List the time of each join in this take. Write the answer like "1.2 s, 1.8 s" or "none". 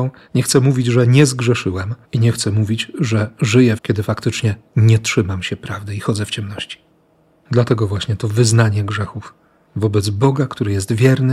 2.0 s, 3.8 s